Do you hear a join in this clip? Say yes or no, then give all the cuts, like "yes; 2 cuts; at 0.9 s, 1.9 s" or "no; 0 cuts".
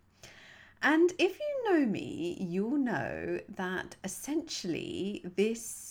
no; 0 cuts